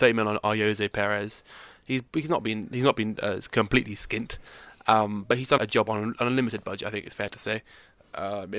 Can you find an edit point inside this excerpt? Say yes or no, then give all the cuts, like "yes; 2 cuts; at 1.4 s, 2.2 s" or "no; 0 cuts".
yes; 1 cut; at 5.6 s